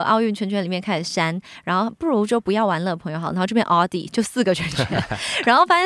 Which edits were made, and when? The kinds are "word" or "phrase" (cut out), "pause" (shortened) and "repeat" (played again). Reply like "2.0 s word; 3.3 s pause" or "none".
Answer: none